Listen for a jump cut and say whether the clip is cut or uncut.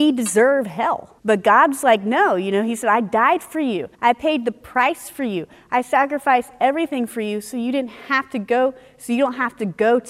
cut